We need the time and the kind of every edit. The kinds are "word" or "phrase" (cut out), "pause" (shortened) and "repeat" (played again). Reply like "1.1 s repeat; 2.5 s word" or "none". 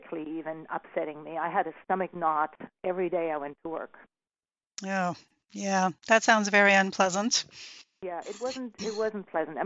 none